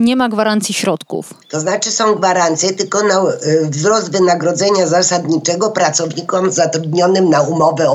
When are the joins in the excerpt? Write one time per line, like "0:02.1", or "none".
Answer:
0:01.4